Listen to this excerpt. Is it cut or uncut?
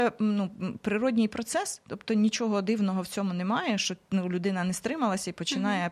uncut